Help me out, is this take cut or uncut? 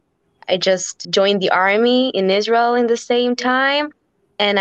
cut